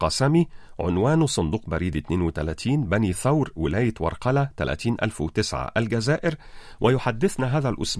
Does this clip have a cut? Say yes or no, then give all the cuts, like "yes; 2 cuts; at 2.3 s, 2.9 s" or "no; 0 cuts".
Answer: no; 0 cuts